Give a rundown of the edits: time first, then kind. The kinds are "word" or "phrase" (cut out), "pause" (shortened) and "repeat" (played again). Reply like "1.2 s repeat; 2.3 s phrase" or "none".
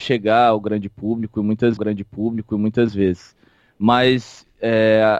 1.8 s repeat